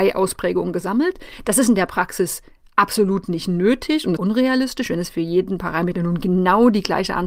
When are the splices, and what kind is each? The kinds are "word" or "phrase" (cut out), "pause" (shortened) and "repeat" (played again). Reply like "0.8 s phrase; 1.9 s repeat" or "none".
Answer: 4.2 s phrase

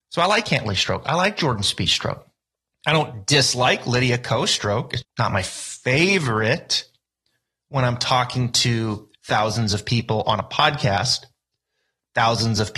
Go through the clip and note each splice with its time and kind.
2.4 s pause; 5.0 s word; 9.2 s pause

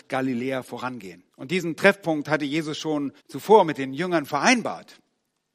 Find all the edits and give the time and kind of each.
1.3 s pause; 3.2 s pause

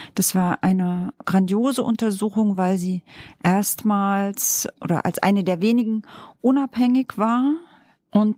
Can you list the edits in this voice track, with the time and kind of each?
none

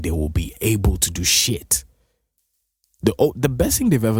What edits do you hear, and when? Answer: none

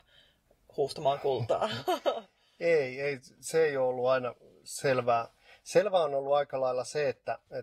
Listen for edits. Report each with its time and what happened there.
none

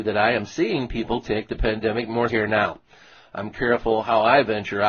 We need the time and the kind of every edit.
2.3 s word

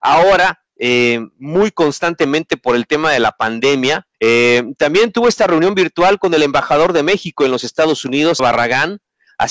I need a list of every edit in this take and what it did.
4.1 s pause; 8.4 s phrase

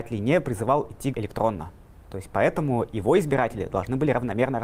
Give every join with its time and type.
1.1 s word

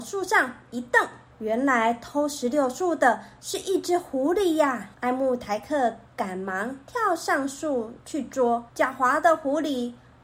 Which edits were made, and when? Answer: 1.3 s pause; 4.9 s pause; 8.0 s pause; 8.7 s pause

